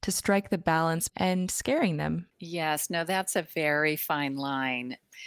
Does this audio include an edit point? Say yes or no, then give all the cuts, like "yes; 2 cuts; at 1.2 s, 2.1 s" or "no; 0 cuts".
yes; 2 cuts; at 1.1 s, 2.3 s